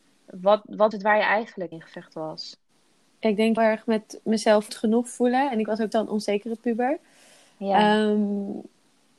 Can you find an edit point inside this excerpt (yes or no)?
yes